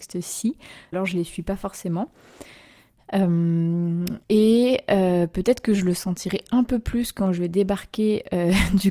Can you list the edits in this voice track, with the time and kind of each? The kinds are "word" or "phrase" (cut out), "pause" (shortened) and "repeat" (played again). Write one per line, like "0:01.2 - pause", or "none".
0:00.9 - phrase
0:04.2 - pause